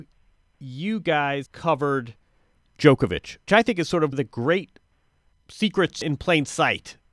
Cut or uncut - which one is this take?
cut